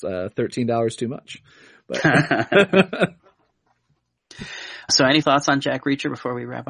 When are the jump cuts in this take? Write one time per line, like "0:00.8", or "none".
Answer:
0:04.9
0:05.2